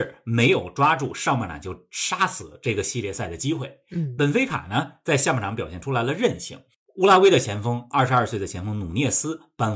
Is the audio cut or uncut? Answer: uncut